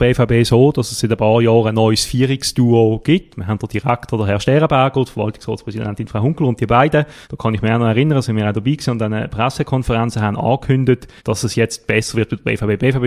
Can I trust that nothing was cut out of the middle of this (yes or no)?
no